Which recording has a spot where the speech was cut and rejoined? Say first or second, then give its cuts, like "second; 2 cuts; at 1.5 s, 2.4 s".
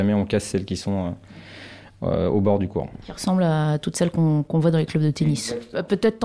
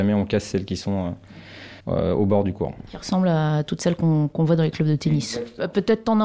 second; 1 cut; at 1.8 s